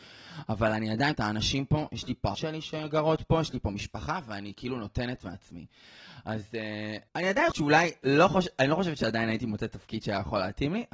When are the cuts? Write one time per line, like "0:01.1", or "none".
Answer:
0:01.1
0:02.3
0:07.1
0:07.5